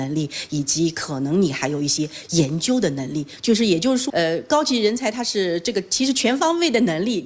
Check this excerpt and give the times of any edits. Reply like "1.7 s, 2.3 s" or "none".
4.1 s